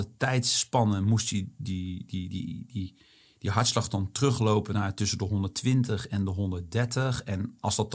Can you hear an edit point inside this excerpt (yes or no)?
no